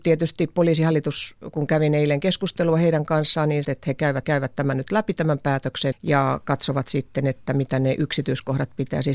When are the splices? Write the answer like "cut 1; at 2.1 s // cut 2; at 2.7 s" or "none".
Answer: cut 1; at 3.6 s // cut 2; at 4.2 s // cut 3; at 5.9 s